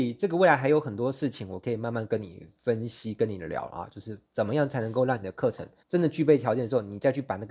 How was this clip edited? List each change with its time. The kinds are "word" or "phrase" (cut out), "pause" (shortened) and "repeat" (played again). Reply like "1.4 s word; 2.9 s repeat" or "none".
5.8 s pause